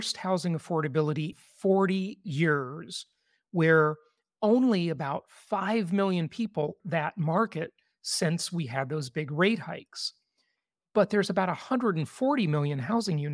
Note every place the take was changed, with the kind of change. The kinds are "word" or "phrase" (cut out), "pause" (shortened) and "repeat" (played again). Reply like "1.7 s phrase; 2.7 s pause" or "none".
1.3 s word; 6.8 s word